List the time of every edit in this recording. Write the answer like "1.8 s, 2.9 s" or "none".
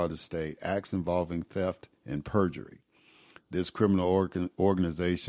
2.0 s